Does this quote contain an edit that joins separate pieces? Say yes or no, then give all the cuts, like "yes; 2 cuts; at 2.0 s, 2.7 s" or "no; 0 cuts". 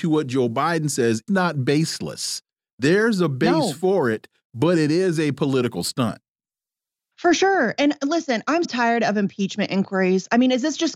yes; 2 cuts; at 1.3 s, 8.6 s